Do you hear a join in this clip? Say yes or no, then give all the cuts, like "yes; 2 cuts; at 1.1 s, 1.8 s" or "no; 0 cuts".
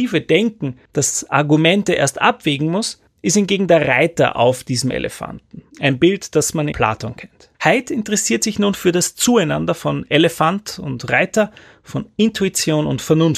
yes; 3 cuts; at 5.7 s, 6.7 s, 7.5 s